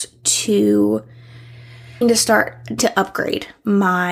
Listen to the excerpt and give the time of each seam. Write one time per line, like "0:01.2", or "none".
0:02.0
0:02.8